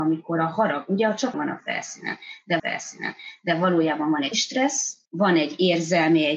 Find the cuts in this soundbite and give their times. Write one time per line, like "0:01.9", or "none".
0:01.3
0:02.6
0:04.3
0:05.1